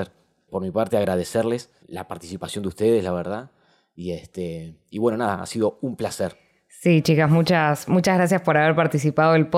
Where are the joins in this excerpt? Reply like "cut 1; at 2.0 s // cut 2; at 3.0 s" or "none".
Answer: none